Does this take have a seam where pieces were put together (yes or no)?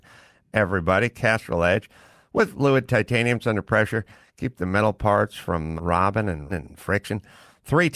yes